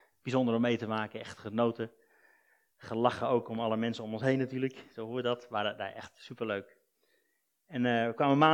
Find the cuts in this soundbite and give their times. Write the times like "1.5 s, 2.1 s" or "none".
none